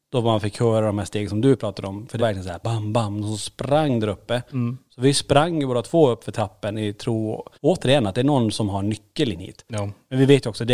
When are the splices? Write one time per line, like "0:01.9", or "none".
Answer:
0:02.2
0:02.6
0:07.5